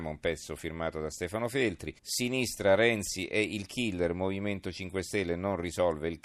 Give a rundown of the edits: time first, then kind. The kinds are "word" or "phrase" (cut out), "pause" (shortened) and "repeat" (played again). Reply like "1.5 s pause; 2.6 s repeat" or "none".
2.0 s pause